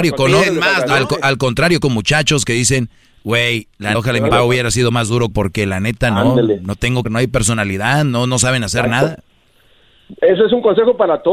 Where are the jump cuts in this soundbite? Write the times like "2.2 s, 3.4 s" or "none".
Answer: 1.8 s, 3.9 s, 4.3 s, 5.3 s, 7.0 s